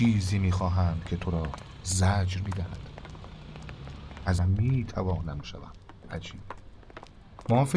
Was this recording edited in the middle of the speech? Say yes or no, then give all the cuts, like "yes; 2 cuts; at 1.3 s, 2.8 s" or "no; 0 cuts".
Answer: yes; 3 cuts; at 4.4 s, 5.4 s, 6.0 s